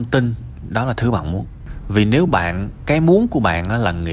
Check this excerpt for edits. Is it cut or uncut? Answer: uncut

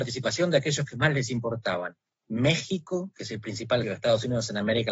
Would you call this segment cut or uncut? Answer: cut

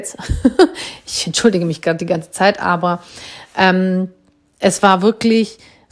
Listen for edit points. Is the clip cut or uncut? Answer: uncut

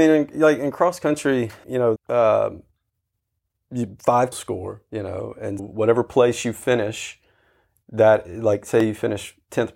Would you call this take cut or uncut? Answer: cut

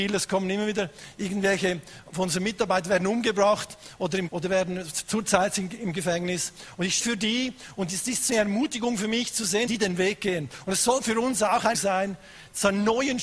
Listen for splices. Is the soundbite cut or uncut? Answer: cut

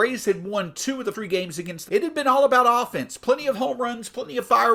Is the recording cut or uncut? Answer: cut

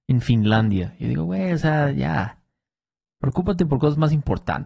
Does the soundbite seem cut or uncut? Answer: uncut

